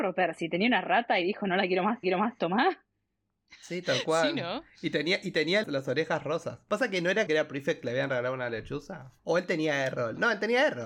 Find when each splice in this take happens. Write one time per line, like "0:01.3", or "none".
0:02.0
0:05.6
0:07.3
0:09.2